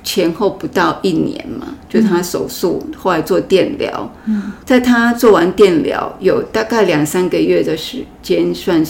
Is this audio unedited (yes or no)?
no